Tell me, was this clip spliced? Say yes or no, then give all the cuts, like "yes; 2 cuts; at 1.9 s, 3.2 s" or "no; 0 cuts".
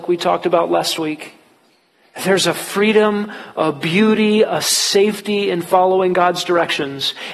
no; 0 cuts